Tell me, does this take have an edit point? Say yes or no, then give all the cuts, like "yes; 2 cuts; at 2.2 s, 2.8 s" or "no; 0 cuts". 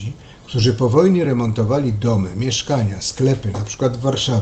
no; 0 cuts